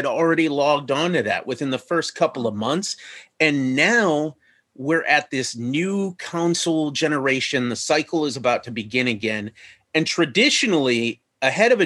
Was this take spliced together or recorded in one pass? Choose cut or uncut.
uncut